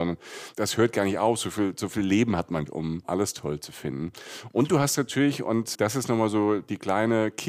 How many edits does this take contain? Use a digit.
2